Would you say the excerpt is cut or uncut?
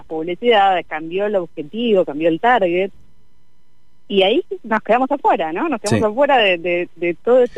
uncut